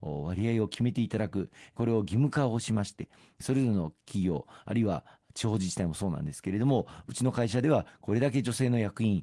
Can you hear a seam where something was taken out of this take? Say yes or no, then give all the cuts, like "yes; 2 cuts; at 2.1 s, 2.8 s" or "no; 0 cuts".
no; 0 cuts